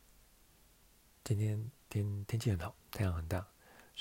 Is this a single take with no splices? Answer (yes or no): no